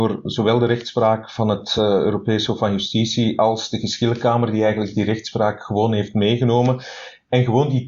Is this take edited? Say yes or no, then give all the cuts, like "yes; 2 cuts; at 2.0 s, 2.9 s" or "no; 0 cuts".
no; 0 cuts